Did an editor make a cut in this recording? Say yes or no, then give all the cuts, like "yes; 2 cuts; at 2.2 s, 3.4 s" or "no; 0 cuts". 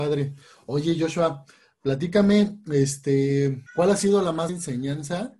yes; 2 cuts; at 3.7 s, 4.5 s